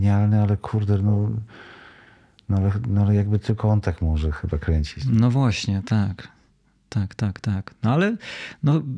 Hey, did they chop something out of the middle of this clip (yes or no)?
no